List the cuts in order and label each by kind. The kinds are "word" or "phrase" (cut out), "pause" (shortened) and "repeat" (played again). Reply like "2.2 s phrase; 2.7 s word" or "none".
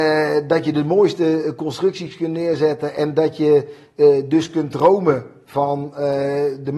none